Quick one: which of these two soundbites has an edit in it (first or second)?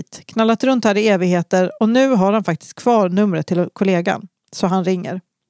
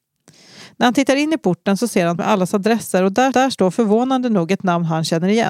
second